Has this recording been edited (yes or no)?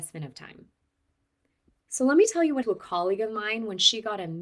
yes